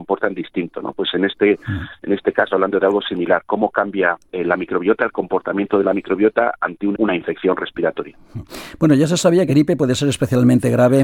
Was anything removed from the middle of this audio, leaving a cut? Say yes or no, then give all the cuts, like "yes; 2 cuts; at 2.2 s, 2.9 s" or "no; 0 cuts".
yes; 4 cuts; at 2.5 s, 4.3 s, 6.9 s, 9.5 s